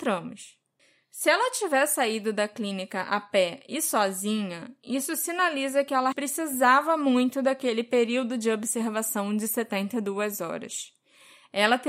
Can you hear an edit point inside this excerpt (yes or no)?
yes